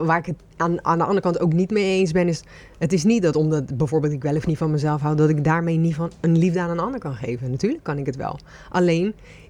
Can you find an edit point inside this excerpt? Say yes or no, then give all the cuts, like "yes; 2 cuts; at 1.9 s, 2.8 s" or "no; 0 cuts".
no; 0 cuts